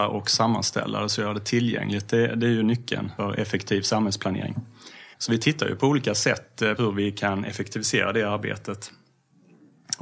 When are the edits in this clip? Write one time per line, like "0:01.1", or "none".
0:03.2
0:05.1
0:06.8